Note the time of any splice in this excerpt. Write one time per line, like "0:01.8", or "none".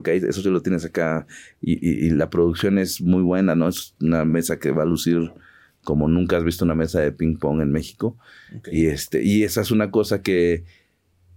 none